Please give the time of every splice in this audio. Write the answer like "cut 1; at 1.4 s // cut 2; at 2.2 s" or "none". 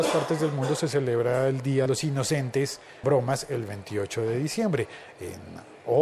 cut 1; at 1.9 s // cut 2; at 3.0 s